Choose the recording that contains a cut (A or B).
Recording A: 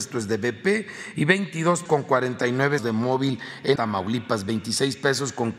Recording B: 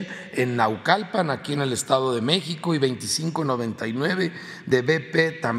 A